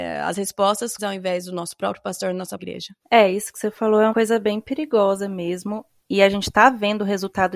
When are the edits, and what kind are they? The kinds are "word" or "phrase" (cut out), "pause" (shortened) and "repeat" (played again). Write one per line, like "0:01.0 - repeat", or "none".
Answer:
0:01.0 - phrase
0:02.6 - word
0:03.0 - pause
0:04.1 - word